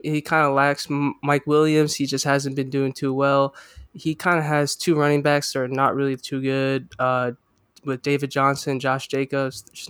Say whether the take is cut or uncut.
uncut